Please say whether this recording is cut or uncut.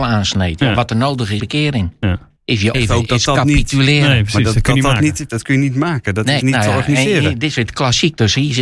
cut